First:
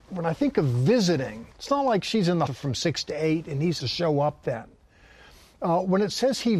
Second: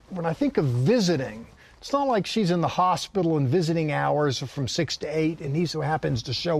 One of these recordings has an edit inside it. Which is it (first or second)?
first